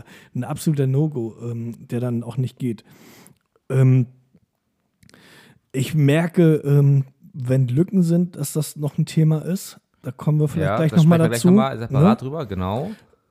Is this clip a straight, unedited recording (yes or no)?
yes